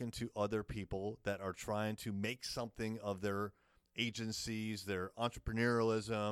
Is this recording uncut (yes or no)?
yes